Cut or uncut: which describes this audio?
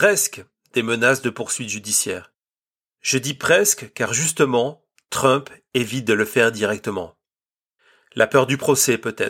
uncut